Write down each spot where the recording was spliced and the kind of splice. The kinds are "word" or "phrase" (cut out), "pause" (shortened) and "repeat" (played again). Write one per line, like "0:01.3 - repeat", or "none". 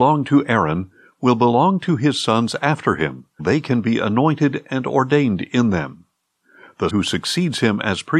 0:03.4 - word
0:06.9 - word